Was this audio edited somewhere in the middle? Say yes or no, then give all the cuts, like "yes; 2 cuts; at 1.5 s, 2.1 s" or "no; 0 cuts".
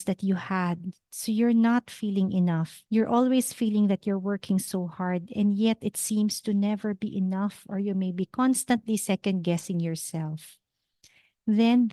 yes; 1 cut; at 2.9 s